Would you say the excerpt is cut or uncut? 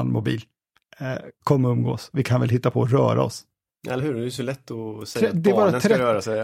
uncut